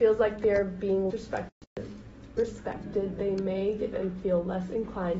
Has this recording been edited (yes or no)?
yes